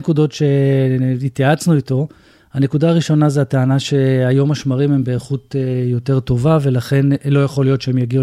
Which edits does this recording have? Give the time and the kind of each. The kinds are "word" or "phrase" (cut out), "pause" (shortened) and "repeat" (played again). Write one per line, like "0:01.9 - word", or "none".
none